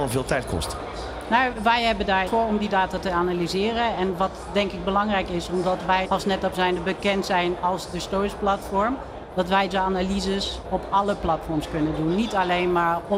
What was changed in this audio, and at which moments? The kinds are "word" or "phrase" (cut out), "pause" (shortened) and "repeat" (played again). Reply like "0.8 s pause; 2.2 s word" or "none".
2.3 s phrase; 6.0 s word; 9.7 s word; 10.6 s word